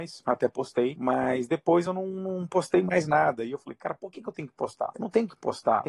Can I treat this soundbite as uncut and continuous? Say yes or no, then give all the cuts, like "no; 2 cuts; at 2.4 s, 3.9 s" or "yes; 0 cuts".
yes; 0 cuts